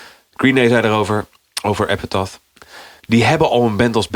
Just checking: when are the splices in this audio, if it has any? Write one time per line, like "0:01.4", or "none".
none